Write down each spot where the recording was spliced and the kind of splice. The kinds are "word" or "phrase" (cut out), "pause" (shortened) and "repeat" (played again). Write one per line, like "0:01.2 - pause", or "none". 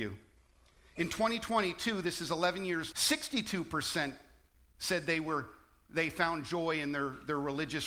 0:02.9 - word